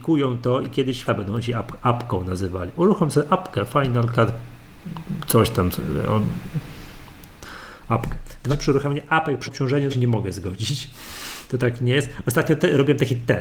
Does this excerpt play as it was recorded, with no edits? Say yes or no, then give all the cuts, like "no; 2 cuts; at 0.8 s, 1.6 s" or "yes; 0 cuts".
no; 4 cuts; at 1.1 s, 8.5 s, 9.5 s, 9.9 s